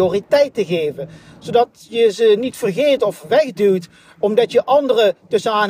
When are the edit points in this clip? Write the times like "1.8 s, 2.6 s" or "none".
none